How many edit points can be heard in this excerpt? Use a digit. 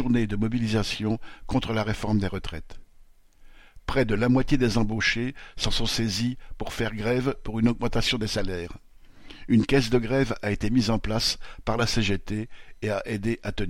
0